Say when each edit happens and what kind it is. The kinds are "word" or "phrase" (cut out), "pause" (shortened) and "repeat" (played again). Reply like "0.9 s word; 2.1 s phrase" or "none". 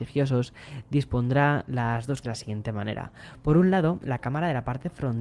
2.2 s word